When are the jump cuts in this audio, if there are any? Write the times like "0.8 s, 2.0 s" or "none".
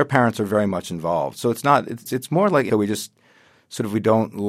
2.1 s, 2.7 s